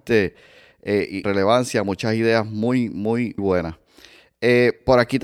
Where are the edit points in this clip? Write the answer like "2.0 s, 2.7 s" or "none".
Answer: 1.2 s, 3.4 s